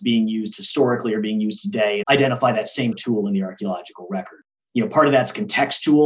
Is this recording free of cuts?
no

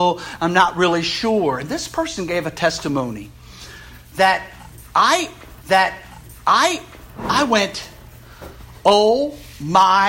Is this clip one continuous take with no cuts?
no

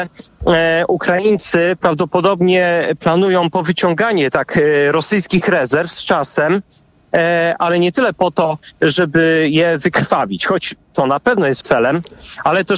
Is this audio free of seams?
no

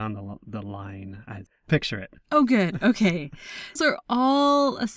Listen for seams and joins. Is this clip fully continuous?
no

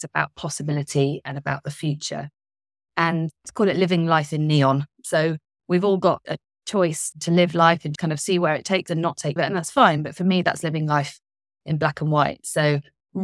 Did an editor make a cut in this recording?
yes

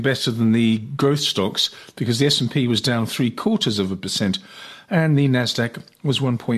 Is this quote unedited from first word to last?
yes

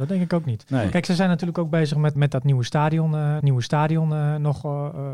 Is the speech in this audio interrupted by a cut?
yes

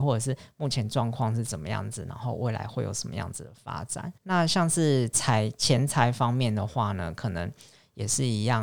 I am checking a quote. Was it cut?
yes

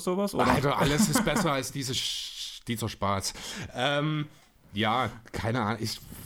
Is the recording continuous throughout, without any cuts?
yes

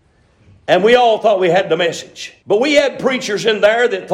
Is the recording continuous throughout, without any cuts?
no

